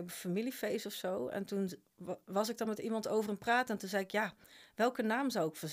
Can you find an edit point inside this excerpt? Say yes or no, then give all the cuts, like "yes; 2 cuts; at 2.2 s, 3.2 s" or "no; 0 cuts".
no; 0 cuts